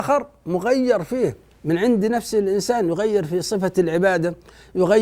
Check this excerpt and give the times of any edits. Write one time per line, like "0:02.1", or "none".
0:01.5

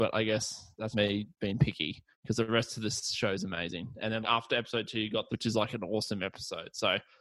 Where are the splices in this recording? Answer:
0:00.9
0:02.1
0:04.2
0:05.3

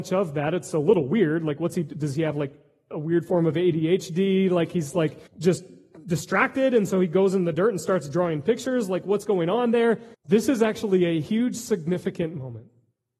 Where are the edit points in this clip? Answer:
0:05.3
0:10.1

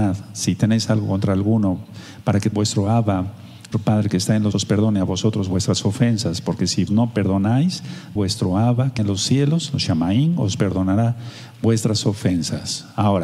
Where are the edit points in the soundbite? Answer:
0:02.5
0:03.7
0:04.5
0:06.9
0:08.2
0:09.0

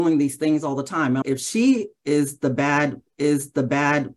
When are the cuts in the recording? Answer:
0:01.2
0:03.1

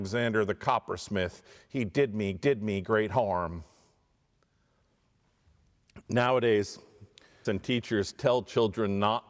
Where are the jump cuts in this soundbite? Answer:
0:02.3
0:07.4

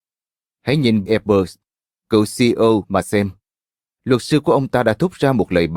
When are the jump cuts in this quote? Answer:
0:01.1
0:02.8

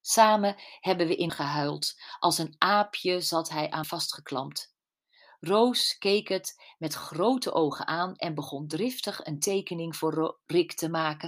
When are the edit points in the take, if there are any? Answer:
0:01.3
0:03.8

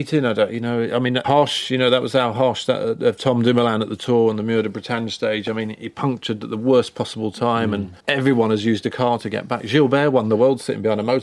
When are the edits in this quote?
0:01.2
0:08.0

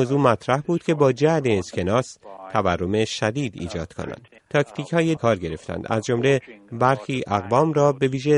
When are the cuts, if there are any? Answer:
0:04.4
0:05.2

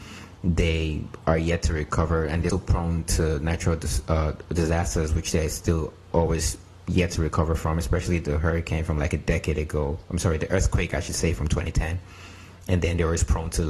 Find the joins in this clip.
0:02.5

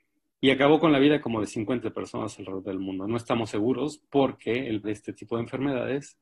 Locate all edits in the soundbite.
0:01.8
0:04.8

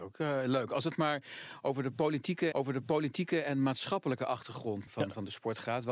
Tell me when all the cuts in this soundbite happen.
0:02.5
0:04.9

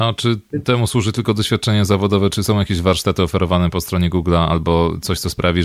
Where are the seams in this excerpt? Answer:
none

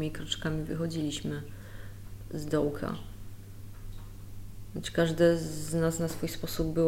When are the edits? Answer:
none

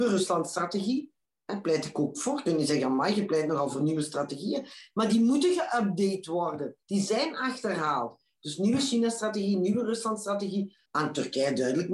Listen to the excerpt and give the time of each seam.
0:06.8
0:10.9

